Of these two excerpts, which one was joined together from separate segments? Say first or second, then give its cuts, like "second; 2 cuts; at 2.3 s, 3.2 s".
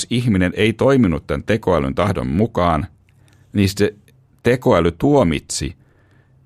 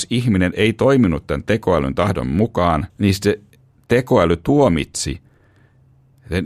second; 1 cut; at 2.9 s